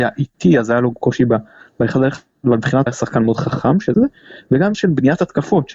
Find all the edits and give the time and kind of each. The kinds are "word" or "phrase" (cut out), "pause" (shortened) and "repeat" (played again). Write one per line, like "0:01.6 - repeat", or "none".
0:00.9 - word
0:02.9 - word
0:03.9 - word
0:04.7 - word